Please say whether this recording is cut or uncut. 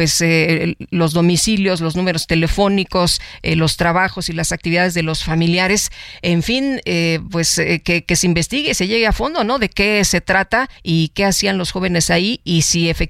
cut